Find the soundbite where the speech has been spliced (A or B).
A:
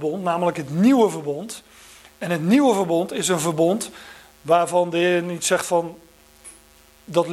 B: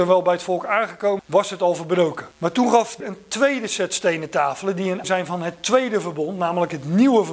B